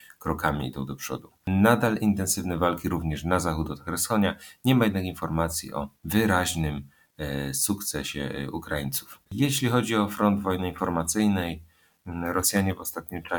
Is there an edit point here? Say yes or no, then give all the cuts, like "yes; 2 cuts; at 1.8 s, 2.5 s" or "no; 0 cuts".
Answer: yes; 2 cuts; at 5.9 s, 9.3 s